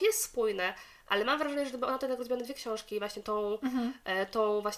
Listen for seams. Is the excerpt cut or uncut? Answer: uncut